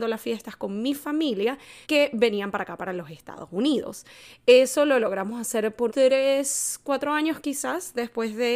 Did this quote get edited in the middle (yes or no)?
yes